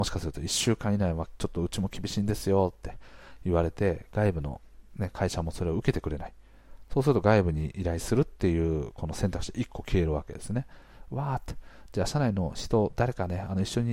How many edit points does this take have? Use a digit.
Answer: 0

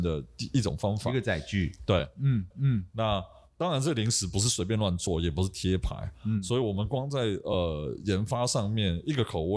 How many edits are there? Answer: 1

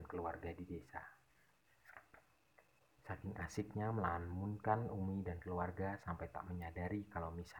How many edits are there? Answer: 0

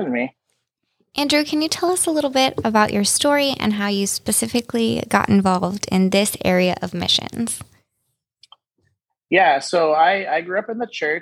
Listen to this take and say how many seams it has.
0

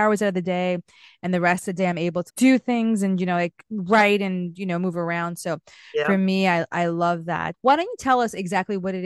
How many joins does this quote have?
3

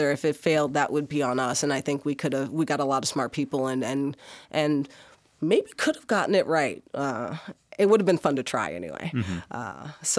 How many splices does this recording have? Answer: 0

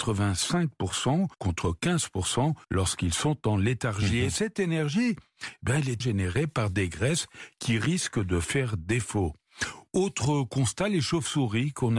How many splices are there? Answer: 3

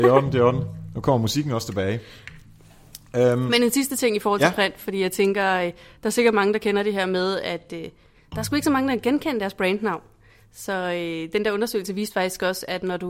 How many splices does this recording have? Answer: 0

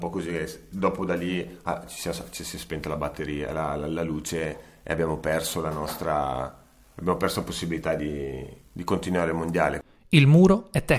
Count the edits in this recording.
0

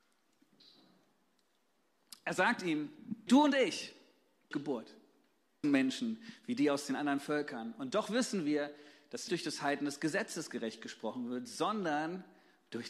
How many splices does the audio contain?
4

